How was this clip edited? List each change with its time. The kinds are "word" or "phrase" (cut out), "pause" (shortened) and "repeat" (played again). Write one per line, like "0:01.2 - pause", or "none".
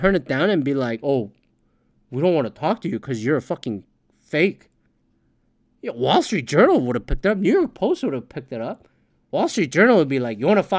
none